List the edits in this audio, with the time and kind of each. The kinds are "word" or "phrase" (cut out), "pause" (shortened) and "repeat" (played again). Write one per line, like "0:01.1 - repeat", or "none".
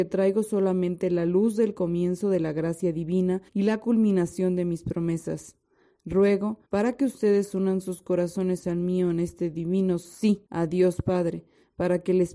0:03.5 - pause
0:06.6 - pause
0:10.4 - pause